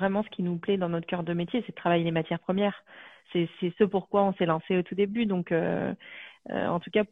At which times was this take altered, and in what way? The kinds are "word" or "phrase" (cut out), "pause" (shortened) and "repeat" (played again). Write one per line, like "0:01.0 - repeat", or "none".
none